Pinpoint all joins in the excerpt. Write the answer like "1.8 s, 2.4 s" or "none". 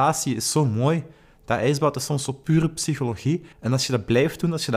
3.5 s